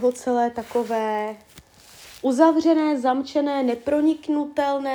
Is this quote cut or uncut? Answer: uncut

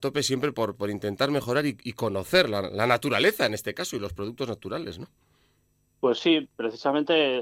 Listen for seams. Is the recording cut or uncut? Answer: uncut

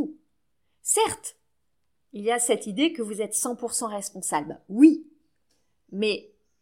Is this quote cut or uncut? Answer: uncut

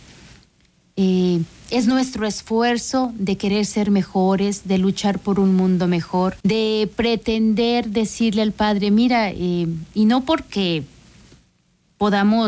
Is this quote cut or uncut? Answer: cut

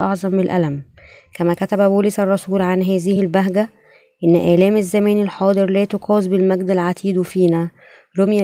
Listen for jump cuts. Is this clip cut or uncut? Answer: uncut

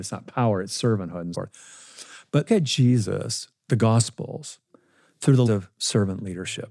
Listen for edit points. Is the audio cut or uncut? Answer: cut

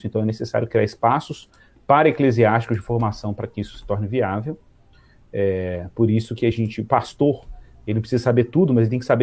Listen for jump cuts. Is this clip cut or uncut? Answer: uncut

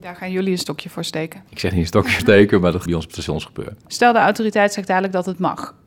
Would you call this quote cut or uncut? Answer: cut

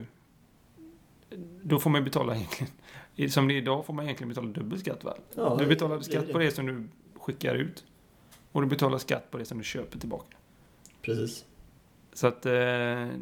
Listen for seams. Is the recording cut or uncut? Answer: uncut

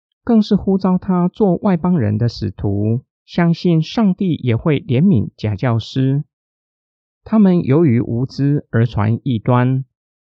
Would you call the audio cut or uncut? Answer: cut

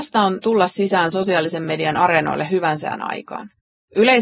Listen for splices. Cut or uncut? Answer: uncut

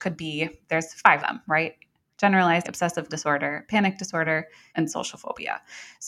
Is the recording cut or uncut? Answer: cut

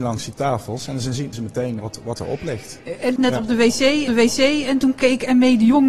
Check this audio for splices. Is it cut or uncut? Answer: cut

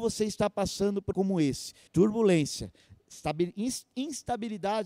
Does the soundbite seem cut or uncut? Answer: cut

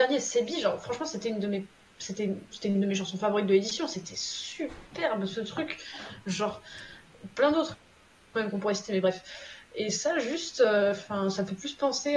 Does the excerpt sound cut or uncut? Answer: uncut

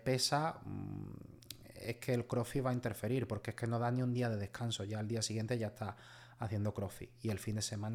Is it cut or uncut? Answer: uncut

